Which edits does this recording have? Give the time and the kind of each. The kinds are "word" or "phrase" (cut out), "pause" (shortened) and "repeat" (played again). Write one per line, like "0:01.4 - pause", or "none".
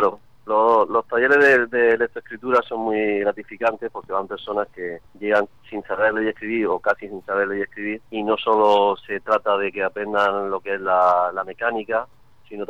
0:05.1 - pause
0:08.1 - pause